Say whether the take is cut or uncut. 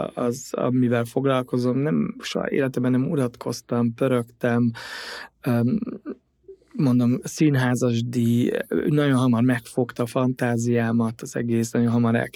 uncut